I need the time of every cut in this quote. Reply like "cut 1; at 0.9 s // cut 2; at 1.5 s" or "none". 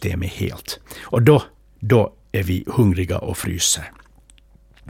none